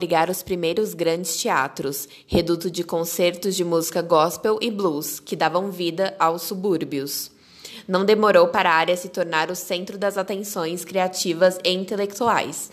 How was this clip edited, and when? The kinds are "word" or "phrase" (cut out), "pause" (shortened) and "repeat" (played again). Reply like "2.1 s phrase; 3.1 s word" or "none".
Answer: none

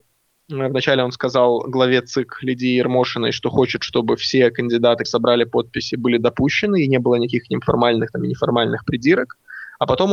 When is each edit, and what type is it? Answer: 5.1 s word

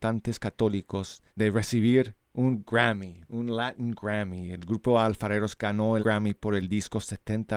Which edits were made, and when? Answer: 1.3 s pause; 6.0 s word

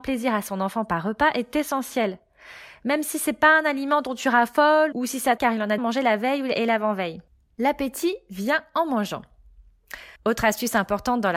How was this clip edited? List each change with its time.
4.9 s word; 5.4 s word; 5.8 s word; 7.3 s pause; 10.2 s pause

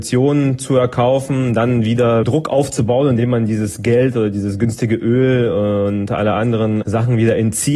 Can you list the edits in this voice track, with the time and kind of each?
none

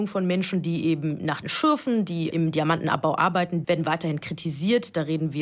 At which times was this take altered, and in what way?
1.4 s word; 2.3 s word; 3.6 s word

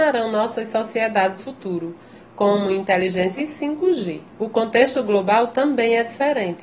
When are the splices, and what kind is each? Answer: 1.4 s word; 3.4 s word; 4.3 s pause

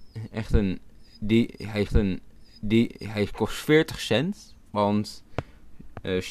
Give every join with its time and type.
1.9 s repeat

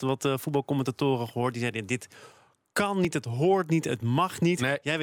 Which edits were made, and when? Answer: none

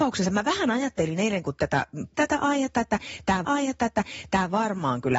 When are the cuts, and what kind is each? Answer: 2.1 s word; 3.4 s repeat

